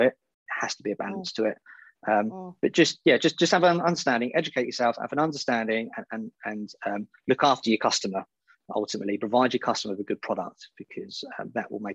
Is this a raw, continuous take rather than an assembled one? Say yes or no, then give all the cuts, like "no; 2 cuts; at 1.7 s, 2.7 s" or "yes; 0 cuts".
yes; 0 cuts